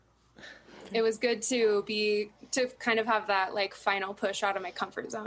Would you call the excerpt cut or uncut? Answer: uncut